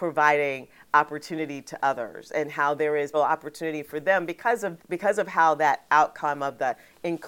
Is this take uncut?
no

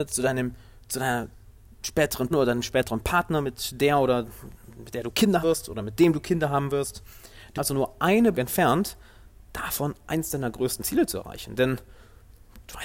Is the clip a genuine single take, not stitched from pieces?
no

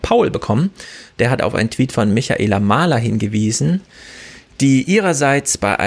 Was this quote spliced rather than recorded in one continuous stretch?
no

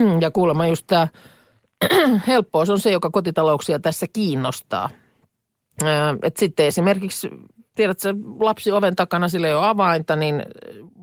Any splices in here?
no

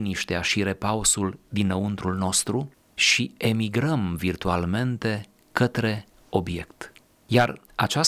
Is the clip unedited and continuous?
yes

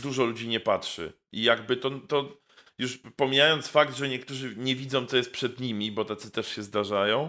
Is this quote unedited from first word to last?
yes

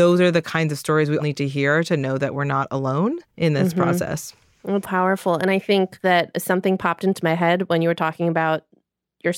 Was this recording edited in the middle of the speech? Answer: yes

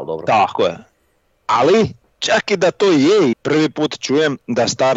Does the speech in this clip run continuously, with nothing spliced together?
no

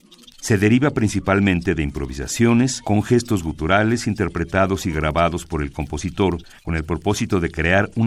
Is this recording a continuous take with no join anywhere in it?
yes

